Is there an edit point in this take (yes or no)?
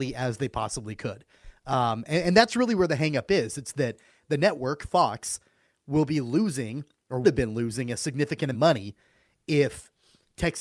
yes